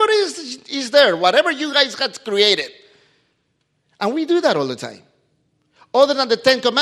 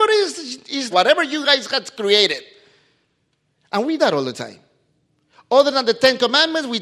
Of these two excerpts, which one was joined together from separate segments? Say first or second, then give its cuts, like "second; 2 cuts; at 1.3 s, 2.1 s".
second; 2 cuts; at 0.9 s, 4.0 s